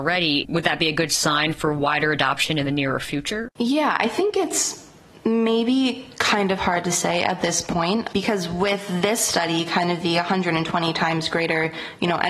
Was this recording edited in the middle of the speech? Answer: no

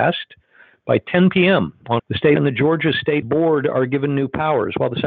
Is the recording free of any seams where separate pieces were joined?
no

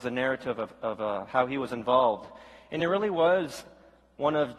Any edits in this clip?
no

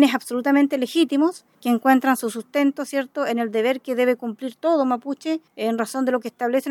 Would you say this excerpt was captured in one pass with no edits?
no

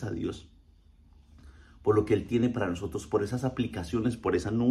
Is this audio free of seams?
yes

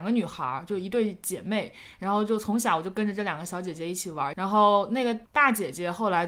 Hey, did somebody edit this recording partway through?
yes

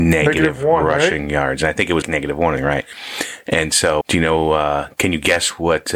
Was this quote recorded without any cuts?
no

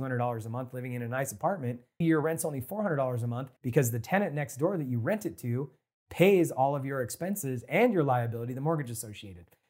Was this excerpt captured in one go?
no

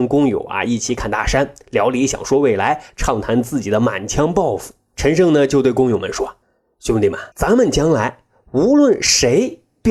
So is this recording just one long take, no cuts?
no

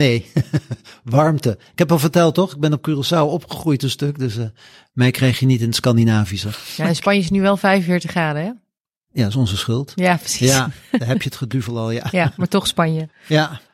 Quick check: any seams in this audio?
no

